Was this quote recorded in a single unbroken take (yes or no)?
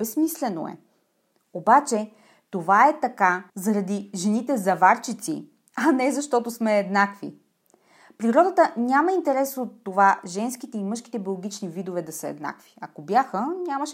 no